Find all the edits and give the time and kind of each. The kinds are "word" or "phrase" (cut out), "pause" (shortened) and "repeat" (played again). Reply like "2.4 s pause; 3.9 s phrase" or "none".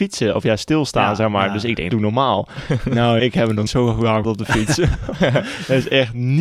1.9 s word; 3.2 s word; 3.7 s word; 4.2 s word

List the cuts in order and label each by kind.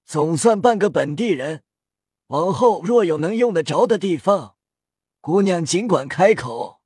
none

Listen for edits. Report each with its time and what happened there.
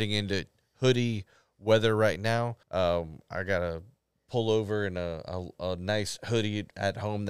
2.6 s pause

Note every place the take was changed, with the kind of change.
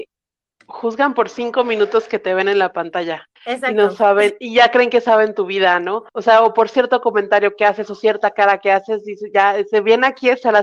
3.4 s pause; 6.1 s pause

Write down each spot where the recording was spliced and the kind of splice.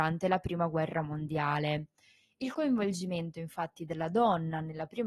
none

